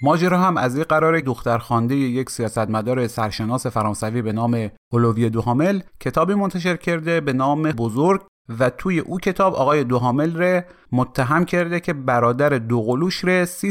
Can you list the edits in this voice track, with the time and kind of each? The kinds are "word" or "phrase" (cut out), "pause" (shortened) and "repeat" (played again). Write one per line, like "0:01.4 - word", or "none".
0:01.2 - word
0:05.9 - pause
0:07.7 - word